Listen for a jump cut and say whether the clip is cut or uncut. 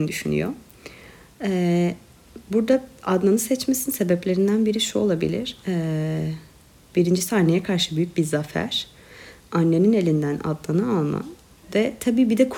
uncut